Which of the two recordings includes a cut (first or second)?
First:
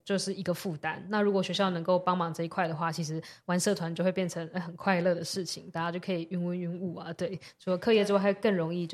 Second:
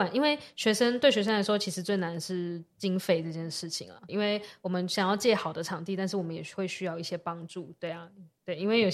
second